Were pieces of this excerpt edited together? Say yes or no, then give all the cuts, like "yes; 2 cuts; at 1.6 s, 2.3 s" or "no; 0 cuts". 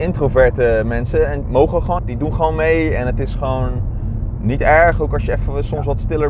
yes; 2 cuts; at 1.4 s, 2.0 s